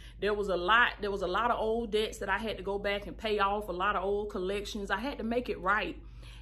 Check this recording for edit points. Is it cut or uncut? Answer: uncut